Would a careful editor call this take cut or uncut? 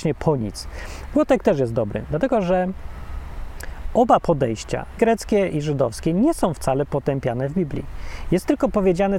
cut